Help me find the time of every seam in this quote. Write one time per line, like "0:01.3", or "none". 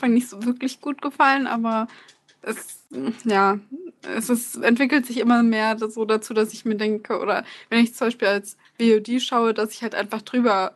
none